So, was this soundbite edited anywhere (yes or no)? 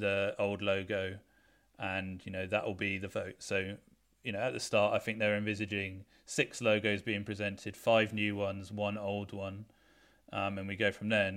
no